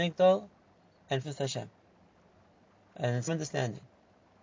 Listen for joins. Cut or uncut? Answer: cut